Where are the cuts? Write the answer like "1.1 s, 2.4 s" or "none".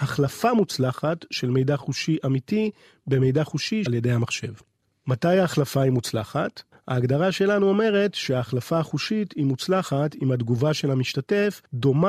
3.9 s